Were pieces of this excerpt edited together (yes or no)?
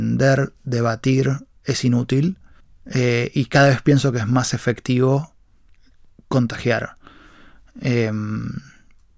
yes